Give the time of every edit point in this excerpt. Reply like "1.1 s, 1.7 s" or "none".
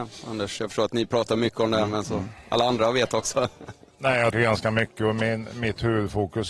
4.3 s